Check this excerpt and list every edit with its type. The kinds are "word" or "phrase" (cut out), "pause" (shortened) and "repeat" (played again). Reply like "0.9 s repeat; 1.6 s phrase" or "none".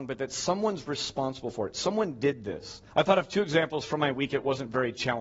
2.9 s pause